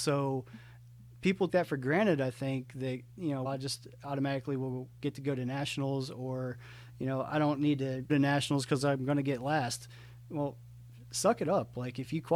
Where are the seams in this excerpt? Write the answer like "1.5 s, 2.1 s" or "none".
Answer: 1.5 s, 3.4 s, 8.1 s